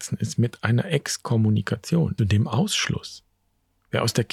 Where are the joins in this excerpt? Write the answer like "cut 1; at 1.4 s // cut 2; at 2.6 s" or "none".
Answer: cut 1; at 2.2 s

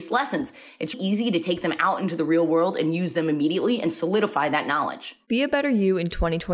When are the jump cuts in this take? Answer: cut 1; at 0.9 s

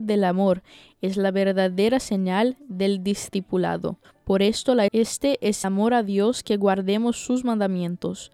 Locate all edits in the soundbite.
cut 1; at 4.0 s // cut 2; at 4.9 s // cut 3; at 5.6 s

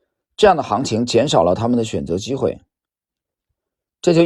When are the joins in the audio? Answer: none

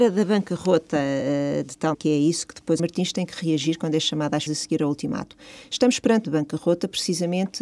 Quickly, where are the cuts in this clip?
cut 1; at 1.9 s // cut 2; at 2.8 s // cut 3; at 4.5 s // cut 4; at 6.2 s

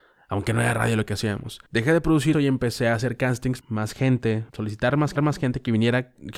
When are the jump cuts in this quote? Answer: cut 1; at 1.7 s // cut 2; at 2.3 s // cut 3; at 3.6 s // cut 4; at 4.5 s // cut 5; at 5.2 s

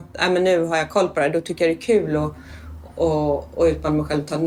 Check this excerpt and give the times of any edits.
none

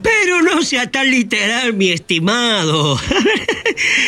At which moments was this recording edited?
none

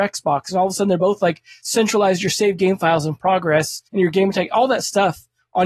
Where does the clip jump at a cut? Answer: cut 1; at 3.9 s

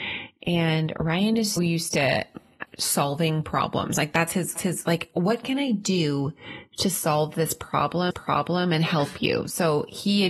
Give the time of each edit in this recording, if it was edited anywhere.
cut 1; at 1.6 s // cut 2; at 2.7 s // cut 3; at 4.6 s // cut 4; at 8.1 s

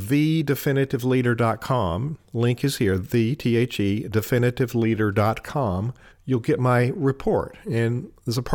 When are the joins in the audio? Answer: cut 1; at 6.1 s

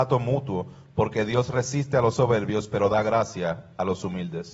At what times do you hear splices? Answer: none

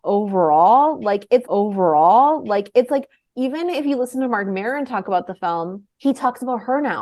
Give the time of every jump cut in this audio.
cut 1; at 1.4 s // cut 2; at 5.9 s

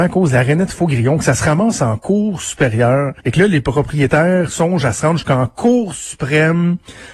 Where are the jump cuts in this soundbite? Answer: cut 1; at 3.2 s

